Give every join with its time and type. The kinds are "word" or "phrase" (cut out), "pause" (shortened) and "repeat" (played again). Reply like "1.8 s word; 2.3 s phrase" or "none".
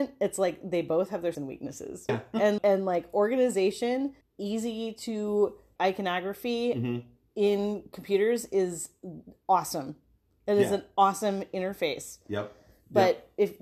1.3 s word; 2.1 s word; 2.6 s word; 4.2 s word; 5.8 s word